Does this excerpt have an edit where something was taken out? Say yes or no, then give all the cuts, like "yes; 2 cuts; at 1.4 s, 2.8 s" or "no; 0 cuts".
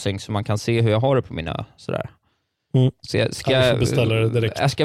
no; 0 cuts